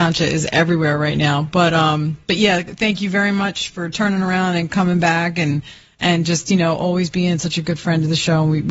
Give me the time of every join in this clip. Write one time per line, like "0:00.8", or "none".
none